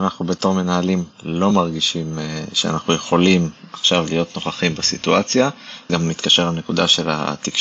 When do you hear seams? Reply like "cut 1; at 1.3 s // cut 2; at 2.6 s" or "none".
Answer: cut 1; at 1.1 s // cut 2; at 5.9 s